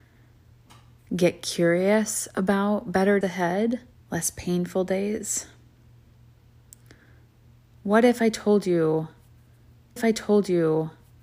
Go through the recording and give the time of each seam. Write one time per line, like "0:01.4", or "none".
0:03.2
0:03.9
0:10.0